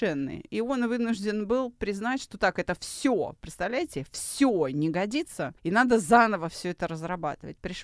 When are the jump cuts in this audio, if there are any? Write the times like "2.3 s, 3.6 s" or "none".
5.6 s